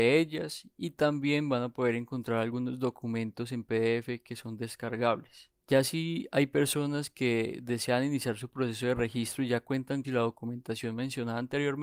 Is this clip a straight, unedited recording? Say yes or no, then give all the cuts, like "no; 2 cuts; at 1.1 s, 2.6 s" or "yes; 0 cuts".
no; 1 cut; at 10.0 s